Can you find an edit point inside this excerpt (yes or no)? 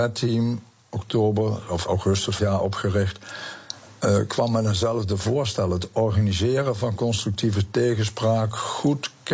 yes